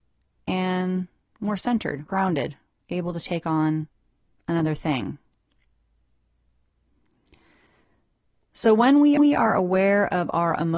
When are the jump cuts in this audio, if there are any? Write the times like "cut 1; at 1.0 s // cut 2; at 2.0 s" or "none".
cut 1; at 2.1 s // cut 2; at 9.2 s